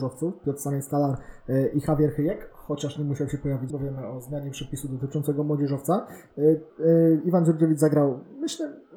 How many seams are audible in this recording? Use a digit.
2